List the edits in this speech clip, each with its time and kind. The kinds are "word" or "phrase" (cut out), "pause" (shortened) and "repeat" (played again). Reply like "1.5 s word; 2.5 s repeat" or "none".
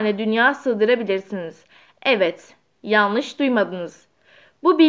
none